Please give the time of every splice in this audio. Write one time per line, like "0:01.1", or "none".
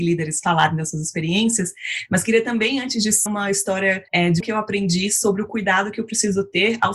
0:03.3
0:04.1
0:04.4